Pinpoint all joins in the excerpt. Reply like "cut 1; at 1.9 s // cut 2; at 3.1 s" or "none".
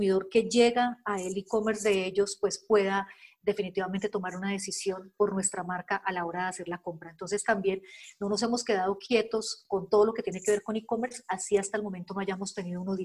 none